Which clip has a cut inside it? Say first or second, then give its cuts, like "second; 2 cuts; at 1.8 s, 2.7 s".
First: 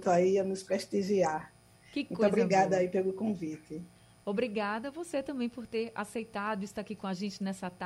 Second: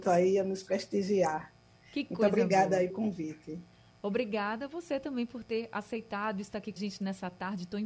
second; 2 cuts; at 2.9 s, 6.8 s